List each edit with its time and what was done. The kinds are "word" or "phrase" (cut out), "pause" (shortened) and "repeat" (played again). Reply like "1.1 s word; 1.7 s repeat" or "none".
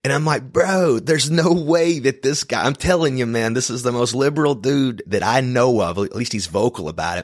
none

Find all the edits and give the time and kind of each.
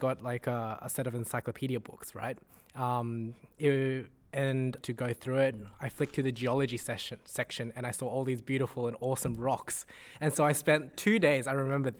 4.8 s phrase

